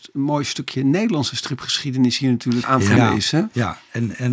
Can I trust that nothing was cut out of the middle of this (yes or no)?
no